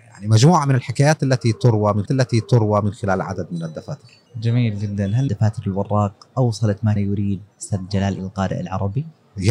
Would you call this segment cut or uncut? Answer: cut